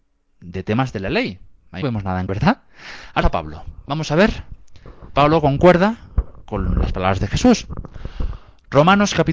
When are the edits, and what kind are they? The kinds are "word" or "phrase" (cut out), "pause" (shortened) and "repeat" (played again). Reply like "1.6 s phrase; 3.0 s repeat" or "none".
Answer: 1.8 s word; 2.3 s word; 3.2 s word; 5.1 s word